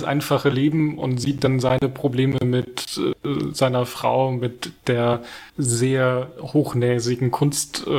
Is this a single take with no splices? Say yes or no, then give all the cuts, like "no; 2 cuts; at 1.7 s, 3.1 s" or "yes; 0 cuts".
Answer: no; 1 cut; at 5.5 s